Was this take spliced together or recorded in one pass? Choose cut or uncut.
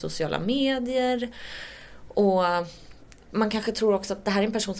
uncut